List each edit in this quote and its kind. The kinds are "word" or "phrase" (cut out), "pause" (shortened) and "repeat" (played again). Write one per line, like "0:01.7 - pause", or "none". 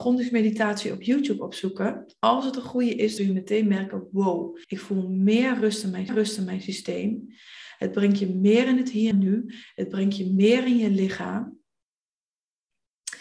0:03.2 - phrase
0:04.6 - pause
0:06.1 - repeat
0:09.1 - word